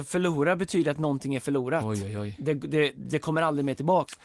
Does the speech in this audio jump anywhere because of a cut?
no; 0 cuts

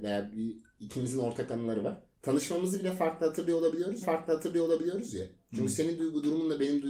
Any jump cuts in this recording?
yes; 2 cuts; at 2.1 s, 4.0 s

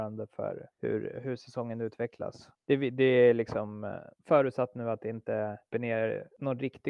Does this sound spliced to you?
yes; 2 cuts; at 4.2 s, 5.7 s

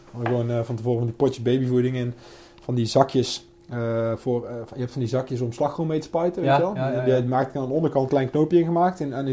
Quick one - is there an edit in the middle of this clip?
yes; 1 cut; at 8.1 s

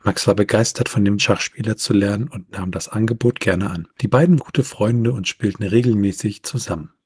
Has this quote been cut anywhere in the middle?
yes; 3 cuts; at 1.2 s, 3.9 s, 4.4 s

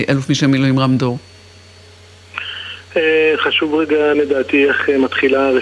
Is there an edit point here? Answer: yes; 1 cut; at 4.1 s

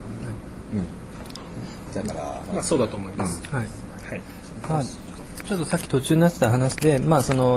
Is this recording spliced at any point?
no; 0 cuts

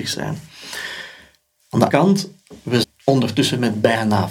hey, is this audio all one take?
no; 2 cuts; at 1.9 s, 2.8 s

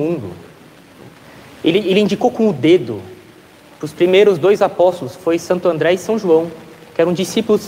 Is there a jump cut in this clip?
no; 0 cuts

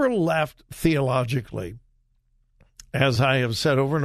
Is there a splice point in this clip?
no; 0 cuts

